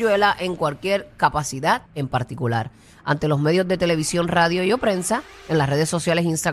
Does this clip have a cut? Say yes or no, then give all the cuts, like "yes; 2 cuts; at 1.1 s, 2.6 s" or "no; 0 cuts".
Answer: yes; 1 cut; at 1.9 s